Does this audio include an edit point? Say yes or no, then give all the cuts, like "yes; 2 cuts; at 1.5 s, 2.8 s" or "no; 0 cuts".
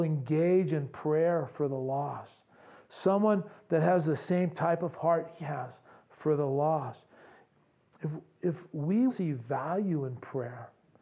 yes; 2 cuts; at 5.4 s, 9.1 s